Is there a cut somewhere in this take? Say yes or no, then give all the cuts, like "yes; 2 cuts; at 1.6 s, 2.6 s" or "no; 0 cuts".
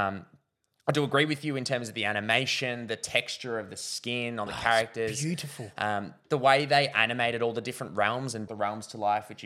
yes; 2 cuts; at 4.5 s, 8.5 s